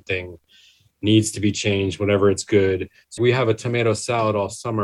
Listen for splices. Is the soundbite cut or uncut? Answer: cut